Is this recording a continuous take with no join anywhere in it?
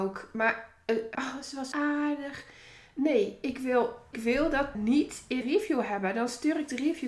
no; 5 cuts; at 1.1 s, 1.7 s, 4.1 s, 4.7 s, 5.4 s

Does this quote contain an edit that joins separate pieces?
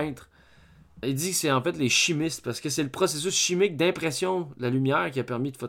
yes; 1 cut; at 1.0 s

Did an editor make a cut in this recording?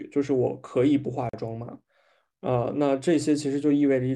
no; 0 cuts

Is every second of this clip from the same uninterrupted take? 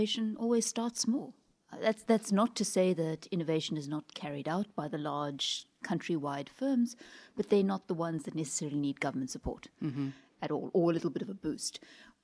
yes; 0 cuts

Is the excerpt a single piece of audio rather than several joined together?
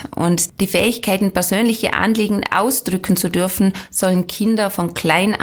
yes; 0 cuts

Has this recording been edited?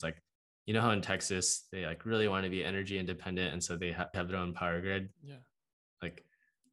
yes; 2 cuts; at 4.1 s, 5.1 s

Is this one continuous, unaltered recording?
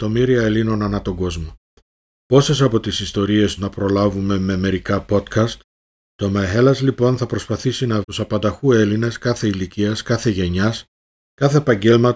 no; 2 cuts; at 3.6 s, 8.0 s

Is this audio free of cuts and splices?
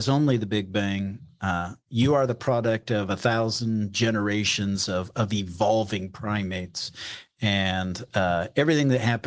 yes; 0 cuts

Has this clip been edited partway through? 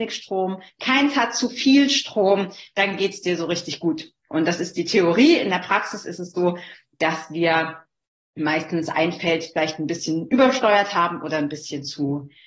no; 0 cuts

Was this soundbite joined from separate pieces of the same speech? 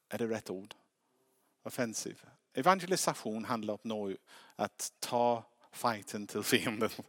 no; 0 cuts

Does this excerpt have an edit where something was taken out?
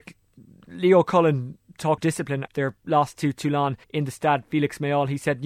yes; 3 cuts; at 2.0 s, 2.5 s, 3.8 s

